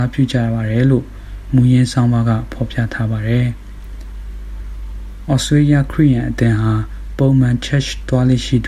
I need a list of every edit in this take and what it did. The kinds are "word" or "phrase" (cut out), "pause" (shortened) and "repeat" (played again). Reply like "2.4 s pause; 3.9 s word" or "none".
none